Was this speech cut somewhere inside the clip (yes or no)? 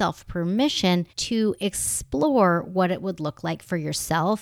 yes